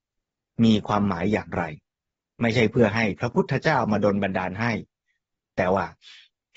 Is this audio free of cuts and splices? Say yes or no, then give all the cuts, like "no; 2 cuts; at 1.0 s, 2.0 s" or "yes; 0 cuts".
yes; 0 cuts